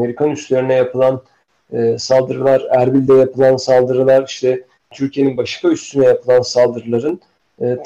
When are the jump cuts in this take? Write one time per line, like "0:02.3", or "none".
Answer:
none

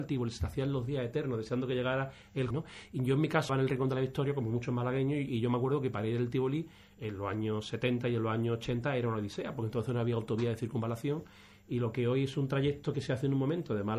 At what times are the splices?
0:02.5
0:03.5

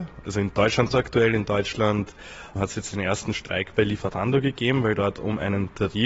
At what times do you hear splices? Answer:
0:00.9
0:02.6

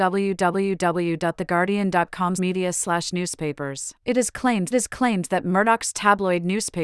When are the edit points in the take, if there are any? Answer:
0:02.4
0:04.0
0:04.7

